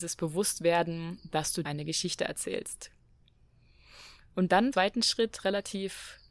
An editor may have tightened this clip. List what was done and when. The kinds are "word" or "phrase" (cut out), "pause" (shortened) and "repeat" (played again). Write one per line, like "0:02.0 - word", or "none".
0:01.6 - word
0:04.7 - phrase